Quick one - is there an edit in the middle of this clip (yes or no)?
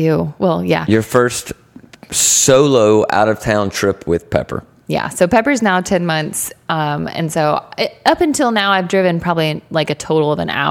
yes